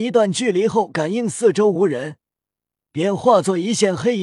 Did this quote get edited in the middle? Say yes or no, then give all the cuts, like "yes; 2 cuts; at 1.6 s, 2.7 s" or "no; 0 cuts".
no; 0 cuts